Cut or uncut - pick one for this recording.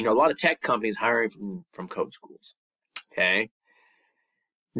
uncut